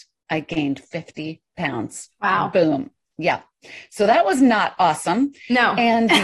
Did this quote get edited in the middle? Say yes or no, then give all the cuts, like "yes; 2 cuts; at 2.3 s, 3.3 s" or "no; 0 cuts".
no; 0 cuts